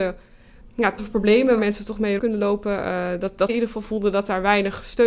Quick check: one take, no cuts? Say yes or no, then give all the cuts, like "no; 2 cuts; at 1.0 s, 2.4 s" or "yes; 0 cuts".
no; 4 cuts; at 1.0 s, 1.6 s, 2.2 s, 3.5 s